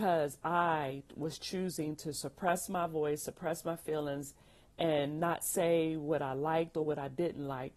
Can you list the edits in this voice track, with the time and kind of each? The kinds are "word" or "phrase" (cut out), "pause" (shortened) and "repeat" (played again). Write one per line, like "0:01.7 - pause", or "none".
none